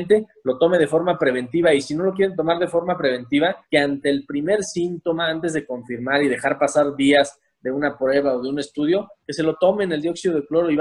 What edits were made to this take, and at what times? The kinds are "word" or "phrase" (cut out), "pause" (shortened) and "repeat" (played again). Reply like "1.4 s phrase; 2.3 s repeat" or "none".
3.6 s pause